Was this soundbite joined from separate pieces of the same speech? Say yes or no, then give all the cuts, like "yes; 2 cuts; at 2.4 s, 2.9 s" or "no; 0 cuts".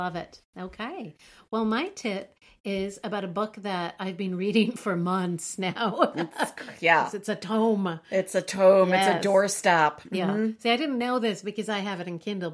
no; 0 cuts